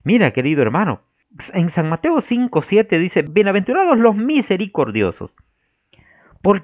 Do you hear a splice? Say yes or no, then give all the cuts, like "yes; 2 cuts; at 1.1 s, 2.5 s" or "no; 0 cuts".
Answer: no; 0 cuts